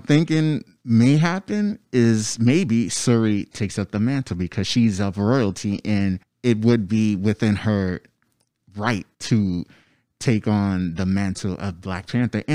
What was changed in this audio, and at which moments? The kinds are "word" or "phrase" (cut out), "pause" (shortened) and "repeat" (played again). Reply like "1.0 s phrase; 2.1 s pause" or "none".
6.2 s pause; 9.1 s pause